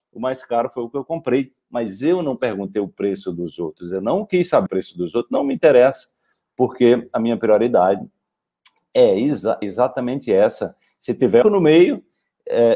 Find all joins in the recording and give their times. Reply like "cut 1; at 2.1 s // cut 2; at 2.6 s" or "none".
cut 1; at 4.7 s // cut 2; at 9.6 s // cut 3; at 11.4 s